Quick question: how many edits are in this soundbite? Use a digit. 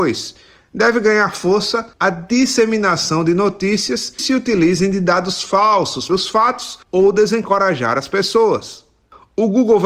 4